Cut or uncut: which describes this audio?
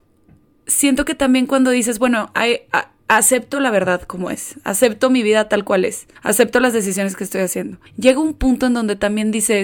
cut